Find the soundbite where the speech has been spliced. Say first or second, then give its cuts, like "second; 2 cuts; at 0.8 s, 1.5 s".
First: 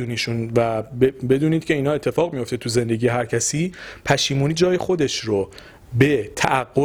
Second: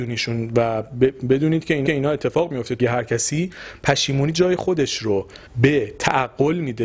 second; 3 cuts; at 1.9 s, 2.8 s, 5.5 s